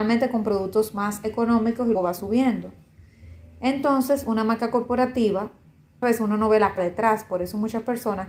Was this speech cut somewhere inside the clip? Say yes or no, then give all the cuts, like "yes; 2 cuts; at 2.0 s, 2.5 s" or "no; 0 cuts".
yes; 3 cuts; at 1.9 s, 6.0 s, 6.8 s